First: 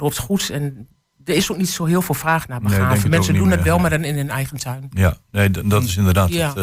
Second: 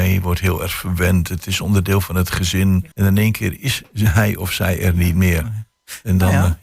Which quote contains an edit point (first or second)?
second